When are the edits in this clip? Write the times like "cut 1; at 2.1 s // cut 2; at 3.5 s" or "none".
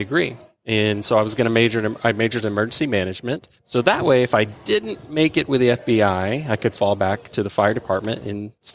cut 1; at 3.6 s

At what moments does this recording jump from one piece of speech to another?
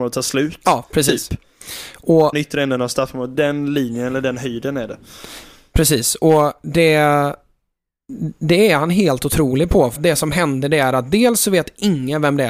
cut 1; at 2.3 s // cut 2; at 3.3 s // cut 3; at 10.0 s

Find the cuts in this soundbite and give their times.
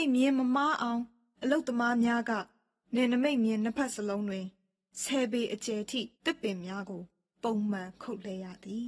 cut 1; at 6.1 s

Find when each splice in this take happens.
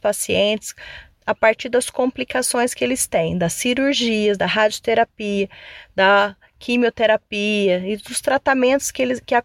none

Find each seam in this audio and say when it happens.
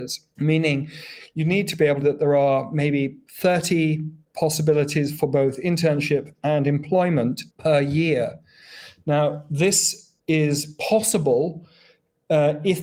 cut 1; at 2.0 s // cut 2; at 7.5 s // cut 3; at 10.2 s

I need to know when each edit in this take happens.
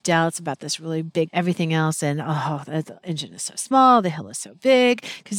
cut 1; at 1.3 s

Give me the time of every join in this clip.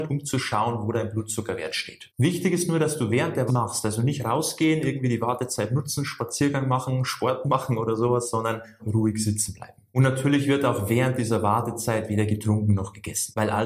cut 1; at 3.5 s // cut 2; at 8.8 s

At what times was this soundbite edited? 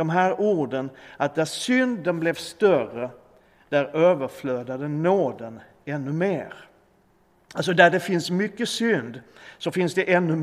none

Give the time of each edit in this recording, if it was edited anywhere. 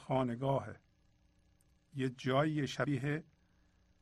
none

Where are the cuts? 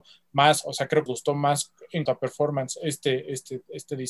cut 1; at 1.1 s // cut 2; at 2.0 s

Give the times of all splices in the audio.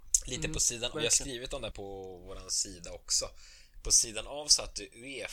cut 1; at 0.9 s // cut 2; at 1.7 s

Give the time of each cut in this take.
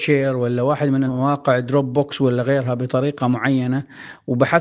cut 1; at 1.1 s

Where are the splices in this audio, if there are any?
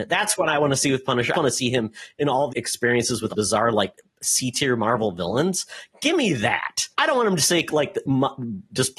cut 1; at 1.3 s // cut 2; at 2.5 s // cut 3; at 3.3 s // cut 4; at 6.9 s

